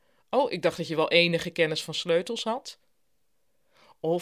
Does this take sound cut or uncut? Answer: uncut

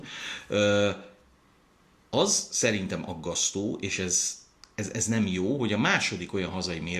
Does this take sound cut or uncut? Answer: uncut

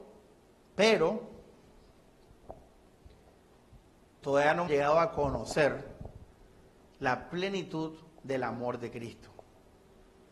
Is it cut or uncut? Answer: cut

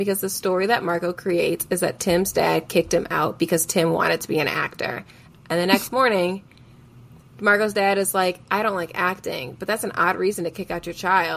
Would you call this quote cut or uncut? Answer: uncut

